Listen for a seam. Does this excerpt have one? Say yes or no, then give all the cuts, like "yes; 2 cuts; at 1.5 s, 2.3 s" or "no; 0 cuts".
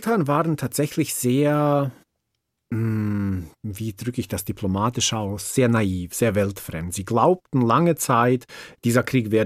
no; 0 cuts